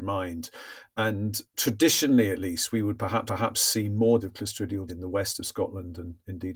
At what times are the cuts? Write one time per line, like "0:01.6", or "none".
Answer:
0:01.5
0:03.3
0:04.2
0:04.9